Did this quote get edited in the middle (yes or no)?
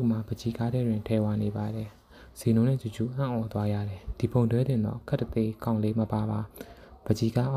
yes